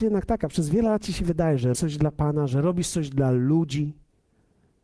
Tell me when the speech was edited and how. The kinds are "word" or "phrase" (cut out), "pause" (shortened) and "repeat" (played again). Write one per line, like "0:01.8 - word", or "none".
0:01.7 - word